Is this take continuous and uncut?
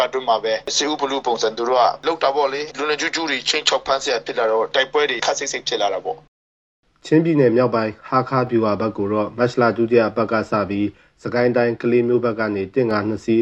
yes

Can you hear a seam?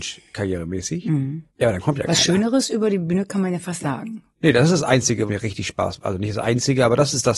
yes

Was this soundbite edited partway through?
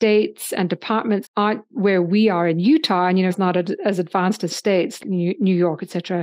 yes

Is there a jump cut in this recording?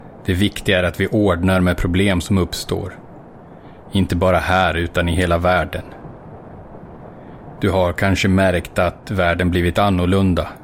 no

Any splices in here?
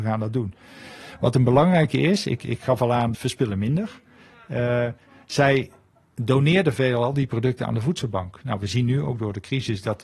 yes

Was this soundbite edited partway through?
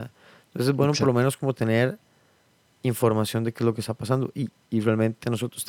no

